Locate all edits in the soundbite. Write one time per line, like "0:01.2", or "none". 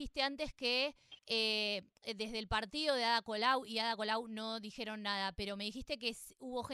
0:01.2